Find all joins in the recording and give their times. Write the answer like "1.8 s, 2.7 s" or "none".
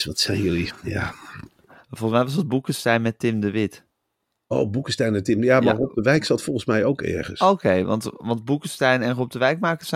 none